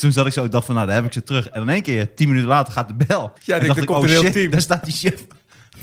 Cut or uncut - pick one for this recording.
cut